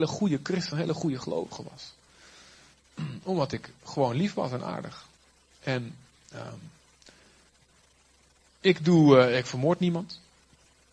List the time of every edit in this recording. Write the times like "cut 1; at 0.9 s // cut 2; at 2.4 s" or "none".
none